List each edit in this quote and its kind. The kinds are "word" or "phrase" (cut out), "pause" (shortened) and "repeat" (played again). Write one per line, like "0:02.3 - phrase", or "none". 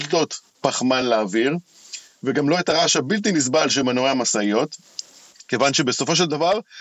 none